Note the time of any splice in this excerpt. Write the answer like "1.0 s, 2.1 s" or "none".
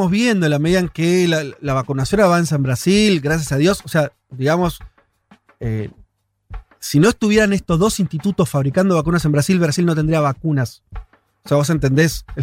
none

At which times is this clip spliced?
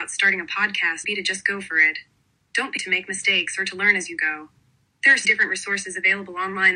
1.0 s, 2.8 s, 5.2 s

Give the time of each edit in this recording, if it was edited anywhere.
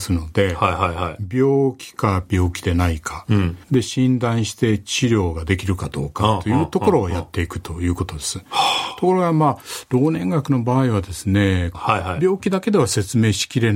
3.6 s

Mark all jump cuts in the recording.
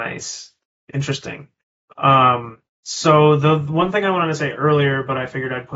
1.8 s

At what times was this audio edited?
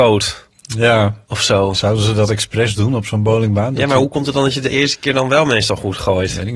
1.2 s

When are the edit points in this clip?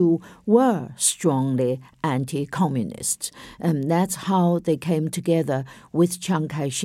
none

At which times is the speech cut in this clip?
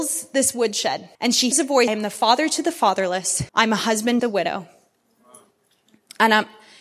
1.1 s, 1.5 s, 1.9 s, 3.5 s, 4.2 s

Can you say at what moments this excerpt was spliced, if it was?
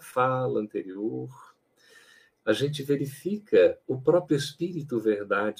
none

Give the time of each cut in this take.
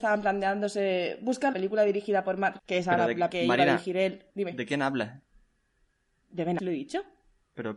1.5 s, 2.6 s, 3.3 s, 4.3 s, 6.6 s

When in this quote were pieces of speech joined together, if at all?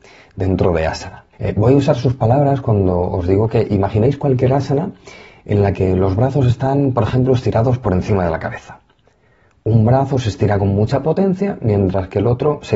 1.3 s

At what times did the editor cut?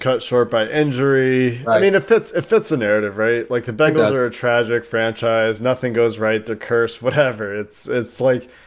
none

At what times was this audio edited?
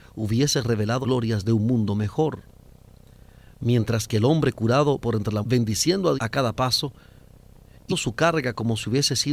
1.0 s, 5.0 s, 5.4 s, 6.2 s, 7.9 s

